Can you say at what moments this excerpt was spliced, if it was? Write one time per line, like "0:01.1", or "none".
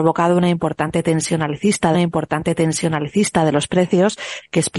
0:01.9